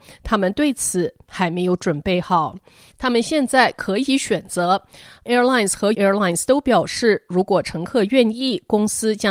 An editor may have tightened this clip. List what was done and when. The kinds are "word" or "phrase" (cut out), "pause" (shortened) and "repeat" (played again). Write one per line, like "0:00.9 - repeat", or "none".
0:05.3 - word
0:05.9 - word